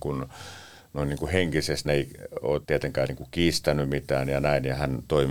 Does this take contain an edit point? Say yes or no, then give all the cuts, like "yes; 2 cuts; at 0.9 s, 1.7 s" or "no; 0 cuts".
yes; 2 cuts; at 1.9 s, 2.6 s